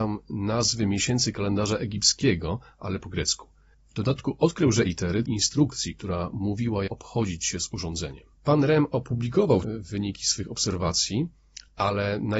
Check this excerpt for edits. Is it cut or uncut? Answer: cut